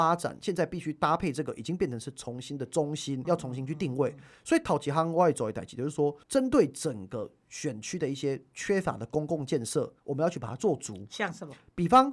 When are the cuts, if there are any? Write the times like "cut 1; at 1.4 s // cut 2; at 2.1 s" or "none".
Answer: cut 1; at 3.2 s // cut 2; at 6.2 s // cut 3; at 10.0 s